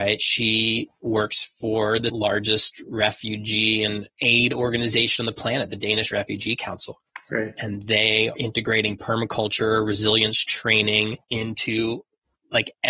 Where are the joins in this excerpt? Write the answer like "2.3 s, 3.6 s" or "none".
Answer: 2.1 s, 8.4 s, 11.2 s